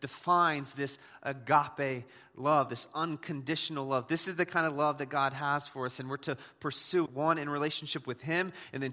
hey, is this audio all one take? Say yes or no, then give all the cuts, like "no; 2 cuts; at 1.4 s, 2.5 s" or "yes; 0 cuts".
no; 1 cut; at 7.1 s